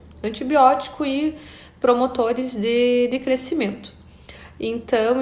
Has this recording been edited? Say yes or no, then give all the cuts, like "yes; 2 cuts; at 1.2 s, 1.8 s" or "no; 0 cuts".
no; 0 cuts